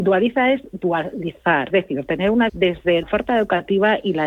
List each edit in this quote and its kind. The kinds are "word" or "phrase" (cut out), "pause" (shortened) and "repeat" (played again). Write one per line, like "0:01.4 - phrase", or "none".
0:01.7 - word
0:02.5 - word
0:03.0 - word